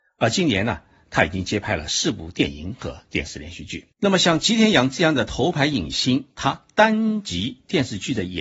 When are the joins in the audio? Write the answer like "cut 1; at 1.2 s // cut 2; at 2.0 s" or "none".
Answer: cut 1; at 3.9 s // cut 2; at 6.3 s